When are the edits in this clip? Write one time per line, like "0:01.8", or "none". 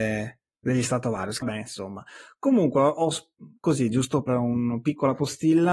0:01.4
0:04.3